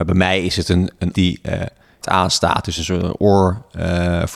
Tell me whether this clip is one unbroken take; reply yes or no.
no